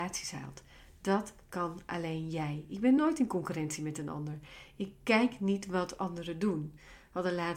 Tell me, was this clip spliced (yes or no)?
no